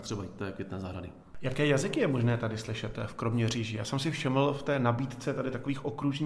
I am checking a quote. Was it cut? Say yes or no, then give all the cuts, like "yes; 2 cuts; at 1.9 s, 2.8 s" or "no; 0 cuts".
no; 0 cuts